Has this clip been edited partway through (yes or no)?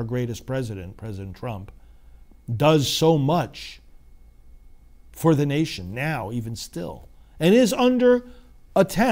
no